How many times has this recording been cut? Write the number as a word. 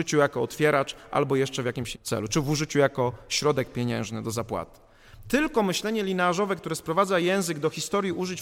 one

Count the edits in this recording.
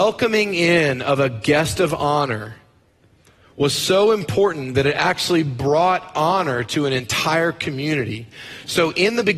zero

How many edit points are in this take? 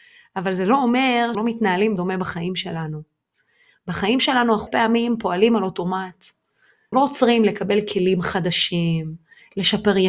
four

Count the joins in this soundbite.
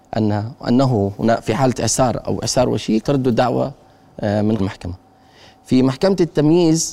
two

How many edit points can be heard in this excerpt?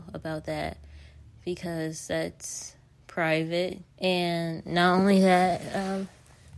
one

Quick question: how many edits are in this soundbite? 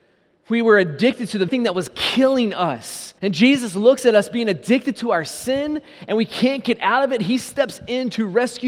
two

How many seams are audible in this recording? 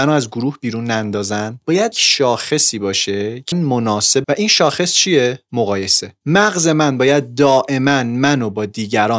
three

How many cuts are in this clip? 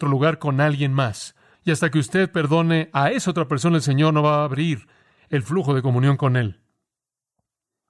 one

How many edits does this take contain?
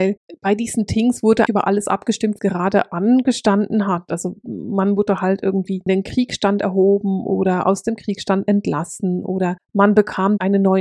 three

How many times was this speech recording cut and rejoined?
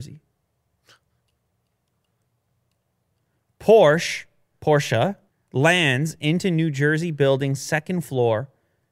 one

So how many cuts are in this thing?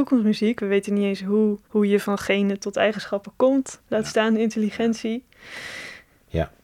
two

